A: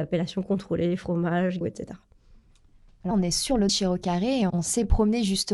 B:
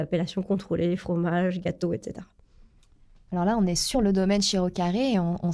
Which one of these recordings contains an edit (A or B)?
A